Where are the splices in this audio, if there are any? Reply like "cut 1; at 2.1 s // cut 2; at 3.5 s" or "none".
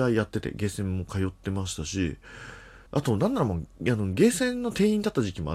cut 1; at 2.9 s